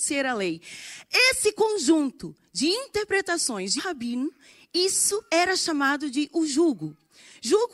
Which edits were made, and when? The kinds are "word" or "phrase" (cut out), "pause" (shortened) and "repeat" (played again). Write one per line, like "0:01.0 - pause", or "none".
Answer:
0:03.8 - word
0:05.3 - pause